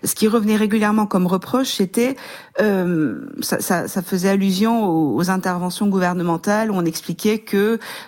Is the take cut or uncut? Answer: uncut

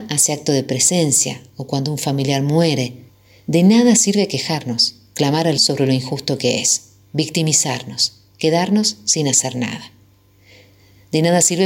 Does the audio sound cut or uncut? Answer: cut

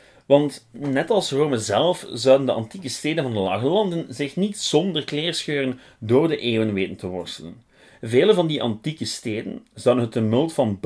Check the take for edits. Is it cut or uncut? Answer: uncut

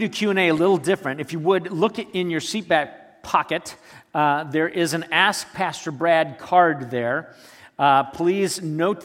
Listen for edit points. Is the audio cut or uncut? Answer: uncut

